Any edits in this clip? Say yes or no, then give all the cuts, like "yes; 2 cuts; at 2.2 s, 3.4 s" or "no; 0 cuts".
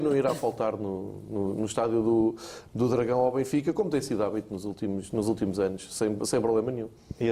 no; 0 cuts